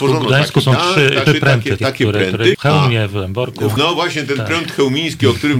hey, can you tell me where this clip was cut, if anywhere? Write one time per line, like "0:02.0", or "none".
0:01.3
0:01.8
0:02.5
0:03.8